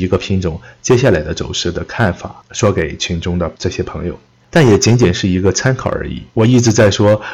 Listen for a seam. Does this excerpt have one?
yes; 2 cuts; at 4.3 s, 6.3 s

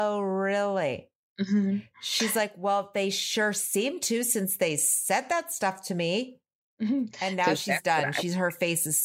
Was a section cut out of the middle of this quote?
no; 0 cuts

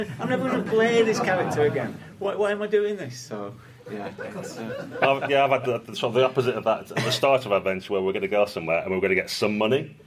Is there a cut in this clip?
no; 0 cuts

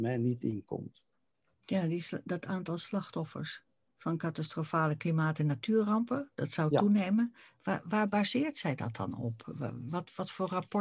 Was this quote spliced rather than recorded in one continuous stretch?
no; 0 cuts

